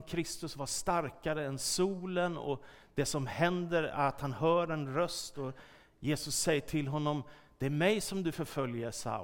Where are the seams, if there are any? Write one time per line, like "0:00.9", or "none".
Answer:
none